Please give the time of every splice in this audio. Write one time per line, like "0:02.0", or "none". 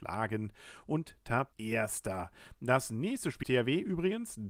0:01.5
0:03.4